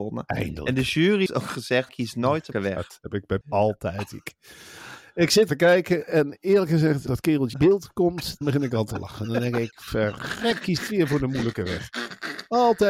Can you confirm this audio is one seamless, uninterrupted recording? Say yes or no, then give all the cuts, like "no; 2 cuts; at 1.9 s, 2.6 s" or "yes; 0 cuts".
no; 9 cuts; at 1.3 s, 1.9 s, 2.5 s, 3.4 s, 5.5 s, 7.1 s, 7.5 s, 8.4 s, 10.6 s